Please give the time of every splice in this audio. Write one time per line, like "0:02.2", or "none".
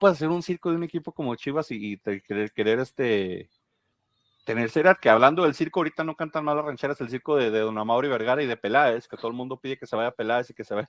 none